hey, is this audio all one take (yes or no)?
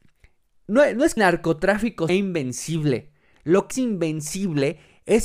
no